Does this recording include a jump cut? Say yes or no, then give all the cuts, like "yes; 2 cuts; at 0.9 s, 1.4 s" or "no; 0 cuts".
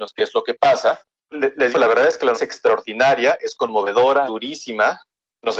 yes; 4 cuts; at 1.3 s, 1.7 s, 2.3 s, 4.3 s